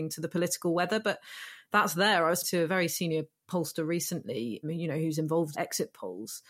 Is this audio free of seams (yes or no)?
no